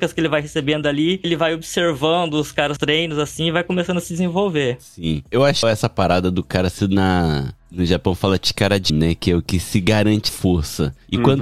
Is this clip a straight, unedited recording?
no; 6 cuts; at 1.2 s, 2.8 s, 5.6 s, 6.8 s, 8.9 s, 10.3 s

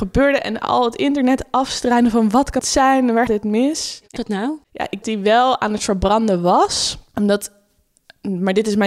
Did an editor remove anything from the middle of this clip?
yes; 5 cuts; at 2.6 s, 3.3 s, 4.2 s, 5.0 s, 7.1 s

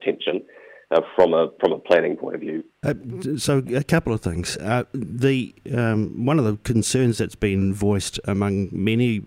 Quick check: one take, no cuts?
no; 1 cut; at 2.7 s

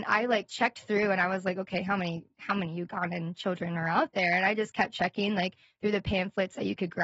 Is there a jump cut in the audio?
no; 0 cuts

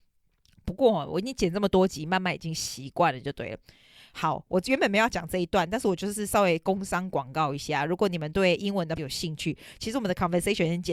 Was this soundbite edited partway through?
yes; 1 cut; at 9.0 s

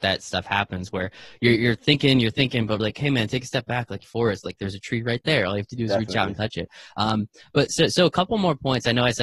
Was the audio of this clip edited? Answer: yes; 3 cuts; at 1.6 s, 2.8 s, 4.0 s

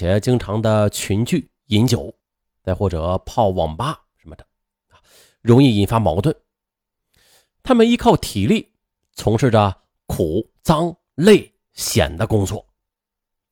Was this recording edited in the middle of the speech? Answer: no; 0 cuts

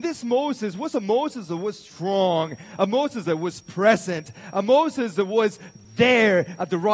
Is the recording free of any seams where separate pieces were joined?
yes; 0 cuts

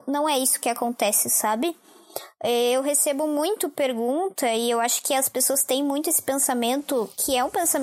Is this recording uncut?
yes; 0 cuts

